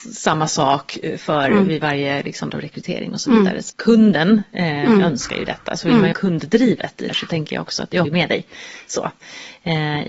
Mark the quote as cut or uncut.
cut